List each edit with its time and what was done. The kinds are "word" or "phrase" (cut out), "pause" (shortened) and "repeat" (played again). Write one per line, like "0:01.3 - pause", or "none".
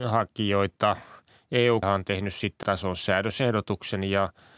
0:01.8 - word
0:02.6 - word